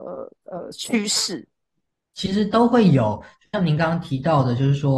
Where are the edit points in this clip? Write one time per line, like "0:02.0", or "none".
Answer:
none